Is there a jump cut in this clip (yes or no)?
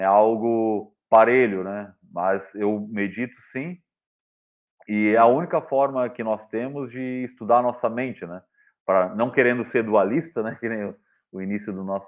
no